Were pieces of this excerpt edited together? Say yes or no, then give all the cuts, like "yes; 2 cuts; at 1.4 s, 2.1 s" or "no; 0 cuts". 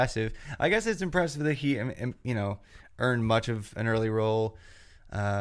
no; 0 cuts